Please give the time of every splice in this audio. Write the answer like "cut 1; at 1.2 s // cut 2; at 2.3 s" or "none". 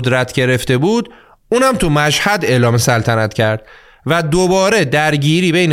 none